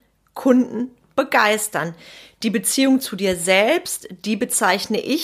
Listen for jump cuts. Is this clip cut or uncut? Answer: uncut